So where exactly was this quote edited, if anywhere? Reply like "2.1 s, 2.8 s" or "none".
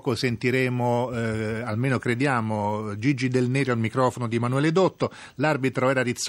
none